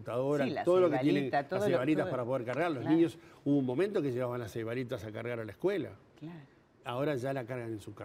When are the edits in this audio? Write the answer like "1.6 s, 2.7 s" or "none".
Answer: none